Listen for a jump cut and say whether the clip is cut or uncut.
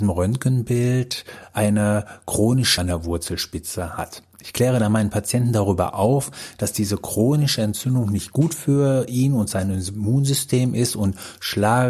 cut